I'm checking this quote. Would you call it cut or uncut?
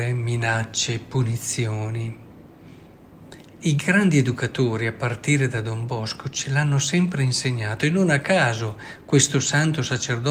uncut